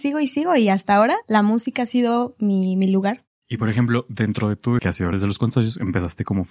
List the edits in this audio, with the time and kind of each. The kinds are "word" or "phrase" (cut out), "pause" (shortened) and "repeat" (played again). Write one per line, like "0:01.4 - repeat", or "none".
0:04.8 - phrase
0:05.1 - phrase